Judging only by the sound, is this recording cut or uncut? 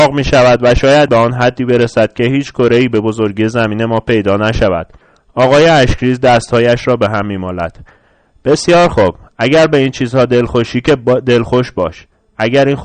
cut